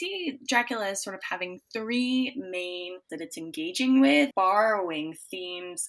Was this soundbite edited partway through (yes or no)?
yes